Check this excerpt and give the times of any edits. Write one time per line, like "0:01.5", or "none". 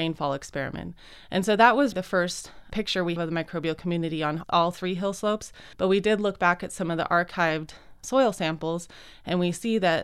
0:01.9
0:03.2
0:05.7